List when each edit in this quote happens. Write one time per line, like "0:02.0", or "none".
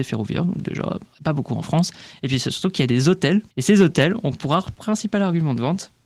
0:01.1
0:03.5